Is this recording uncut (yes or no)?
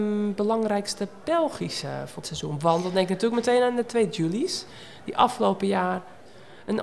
no